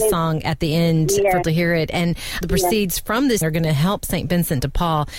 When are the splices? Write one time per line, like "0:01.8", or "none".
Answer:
0:01.4
0:02.4
0:03.4